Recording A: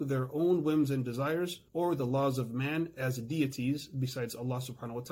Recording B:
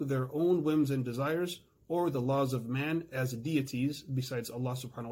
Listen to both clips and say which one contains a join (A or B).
A